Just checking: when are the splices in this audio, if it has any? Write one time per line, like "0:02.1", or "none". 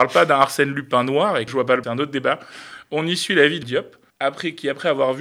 0:01.5
0:01.8
0:03.6
0:04.1